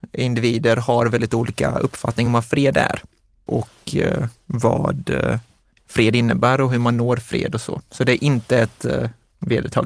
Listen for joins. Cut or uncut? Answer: uncut